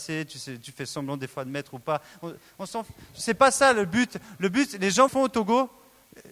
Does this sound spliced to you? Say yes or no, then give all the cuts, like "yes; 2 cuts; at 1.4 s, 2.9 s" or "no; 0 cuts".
yes; 1 cut; at 5.1 s